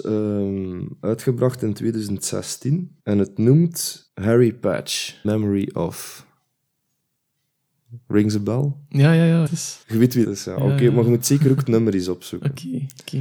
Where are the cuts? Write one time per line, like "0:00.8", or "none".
0:03.0
0:04.1
0:05.2
0:09.5
0:09.8
0:10.2